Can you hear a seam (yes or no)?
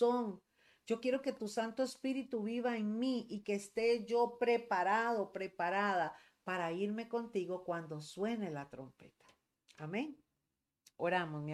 no